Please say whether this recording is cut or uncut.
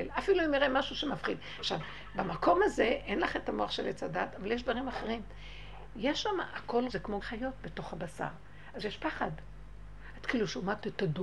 cut